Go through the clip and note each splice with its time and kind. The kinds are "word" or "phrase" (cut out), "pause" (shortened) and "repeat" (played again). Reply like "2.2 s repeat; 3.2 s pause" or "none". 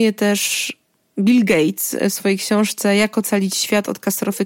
none